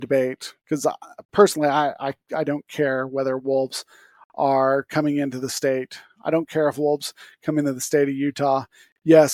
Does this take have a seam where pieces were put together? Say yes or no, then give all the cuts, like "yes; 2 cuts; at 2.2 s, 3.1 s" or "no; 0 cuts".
no; 0 cuts